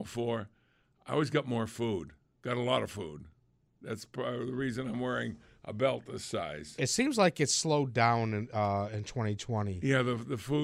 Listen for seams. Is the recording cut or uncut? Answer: uncut